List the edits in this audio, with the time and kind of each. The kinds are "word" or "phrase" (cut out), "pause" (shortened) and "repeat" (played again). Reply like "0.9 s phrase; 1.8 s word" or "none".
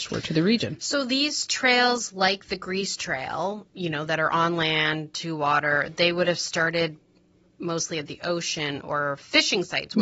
none